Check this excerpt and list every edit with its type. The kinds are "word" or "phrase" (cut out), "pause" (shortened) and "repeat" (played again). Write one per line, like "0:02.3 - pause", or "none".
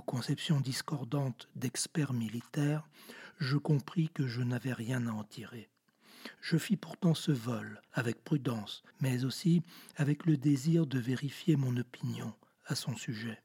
0:07.9 - pause
0:08.9 - pause